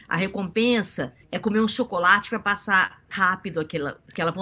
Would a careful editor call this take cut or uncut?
cut